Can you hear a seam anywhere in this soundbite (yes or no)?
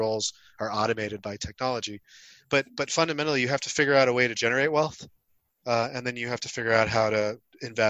no